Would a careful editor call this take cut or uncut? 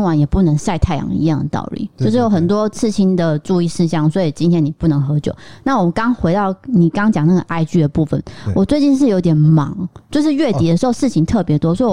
uncut